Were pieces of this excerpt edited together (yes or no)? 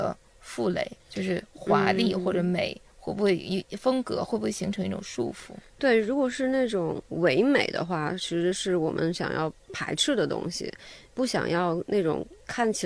yes